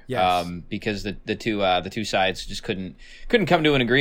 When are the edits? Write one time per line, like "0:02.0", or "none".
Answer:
none